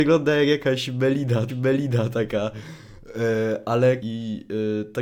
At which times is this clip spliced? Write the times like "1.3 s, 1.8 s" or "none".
1.5 s, 4.0 s

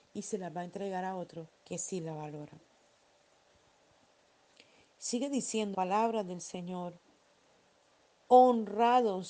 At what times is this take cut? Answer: 1.5 s, 5.7 s

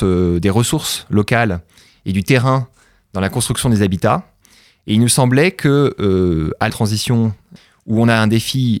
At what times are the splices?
6.7 s

